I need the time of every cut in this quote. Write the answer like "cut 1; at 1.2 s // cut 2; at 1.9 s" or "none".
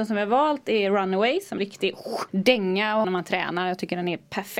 cut 1; at 1.6 s // cut 2; at 2.3 s // cut 3; at 3.0 s